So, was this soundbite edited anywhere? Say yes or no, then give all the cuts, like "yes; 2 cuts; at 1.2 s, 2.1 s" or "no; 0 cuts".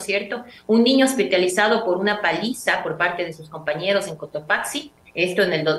no; 0 cuts